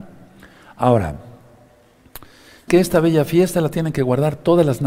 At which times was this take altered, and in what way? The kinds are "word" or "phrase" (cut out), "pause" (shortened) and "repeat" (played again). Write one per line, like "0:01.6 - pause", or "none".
0:02.7 - word